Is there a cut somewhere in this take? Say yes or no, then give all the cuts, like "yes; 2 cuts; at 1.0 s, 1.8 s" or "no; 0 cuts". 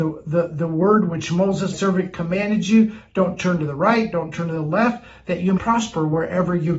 yes; 2 cuts; at 1.7 s, 5.6 s